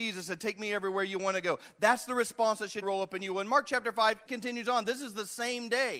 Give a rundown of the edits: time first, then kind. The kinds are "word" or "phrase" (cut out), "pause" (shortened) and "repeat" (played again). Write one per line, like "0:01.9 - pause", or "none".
0:02.8 - word
0:04.3 - word

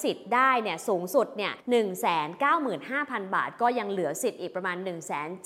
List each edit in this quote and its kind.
0:01.6 - pause

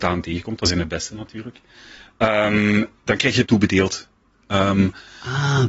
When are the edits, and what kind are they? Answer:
0:03.1 - word
0:03.5 - word

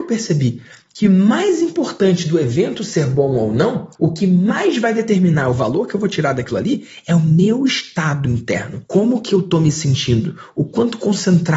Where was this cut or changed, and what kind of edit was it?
0:03.9 - pause

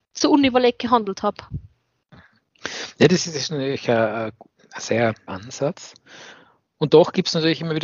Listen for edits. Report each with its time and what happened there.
0:05.3 - word

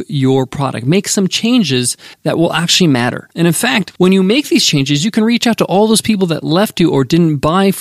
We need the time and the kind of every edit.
0:02.1 - pause
0:03.3 - pause
0:04.0 - pause

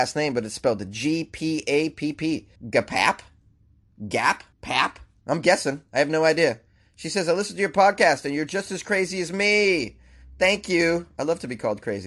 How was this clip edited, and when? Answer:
0:02.6 - pause
0:04.5 - pause
0:06.7 - pause

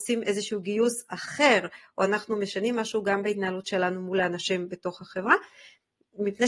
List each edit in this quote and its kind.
none

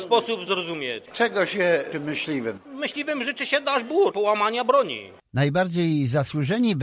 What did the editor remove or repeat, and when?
0:01.9 - word
0:04.1 - word

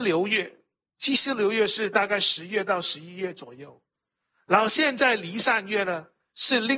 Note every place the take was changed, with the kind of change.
none

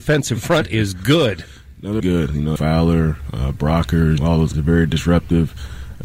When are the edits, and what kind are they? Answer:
0:02.0 - word
0:02.6 - phrase
0:04.2 - word
0:04.5 - word

